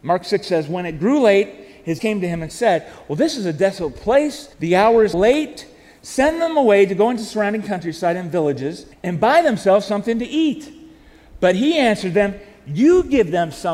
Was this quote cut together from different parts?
yes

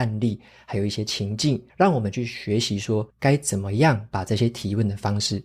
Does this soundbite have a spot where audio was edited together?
yes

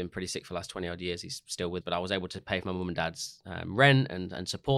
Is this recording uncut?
no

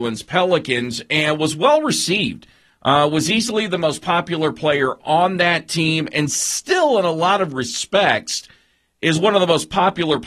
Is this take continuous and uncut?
yes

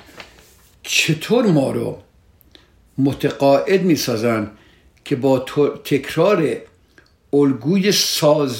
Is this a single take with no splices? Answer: yes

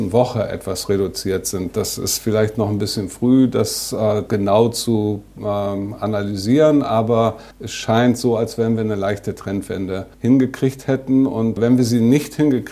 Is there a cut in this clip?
yes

